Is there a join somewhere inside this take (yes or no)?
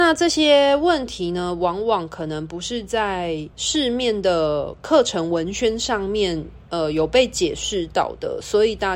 yes